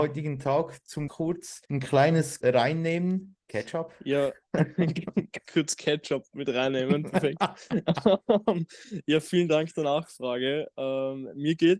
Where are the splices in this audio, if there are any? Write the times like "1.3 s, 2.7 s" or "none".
1.1 s, 1.7 s, 2.4 s, 3.4 s, 5.4 s